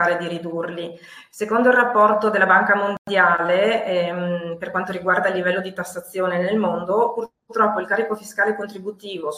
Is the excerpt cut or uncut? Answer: uncut